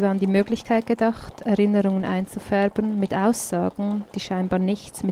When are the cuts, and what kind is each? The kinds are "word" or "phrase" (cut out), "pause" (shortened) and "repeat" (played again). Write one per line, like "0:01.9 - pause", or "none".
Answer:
none